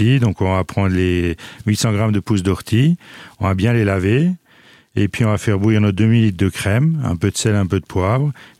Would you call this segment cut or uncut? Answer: uncut